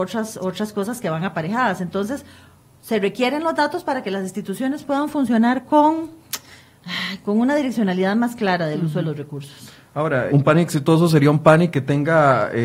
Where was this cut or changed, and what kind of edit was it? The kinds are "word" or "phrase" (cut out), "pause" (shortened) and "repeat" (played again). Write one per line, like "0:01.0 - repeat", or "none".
0:10.3 - word